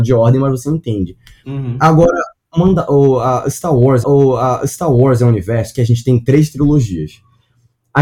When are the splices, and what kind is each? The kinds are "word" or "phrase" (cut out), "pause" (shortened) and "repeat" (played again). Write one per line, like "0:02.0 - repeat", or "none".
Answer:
0:04.0 - repeat